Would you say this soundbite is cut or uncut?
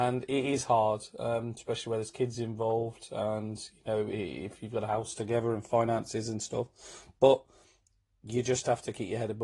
uncut